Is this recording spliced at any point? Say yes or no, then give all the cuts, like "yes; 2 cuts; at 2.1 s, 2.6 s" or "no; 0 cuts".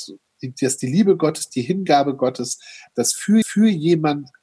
yes; 1 cut; at 3.4 s